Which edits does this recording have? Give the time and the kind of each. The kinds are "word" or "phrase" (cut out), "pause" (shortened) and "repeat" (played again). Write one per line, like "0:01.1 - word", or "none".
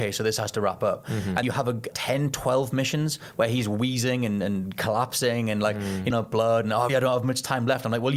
0:01.4 - word
0:01.9 - phrase
0:06.1 - phrase
0:06.9 - word